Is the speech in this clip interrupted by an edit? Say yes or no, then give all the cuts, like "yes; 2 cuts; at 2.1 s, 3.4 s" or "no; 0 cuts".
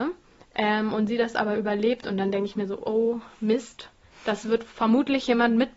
no; 0 cuts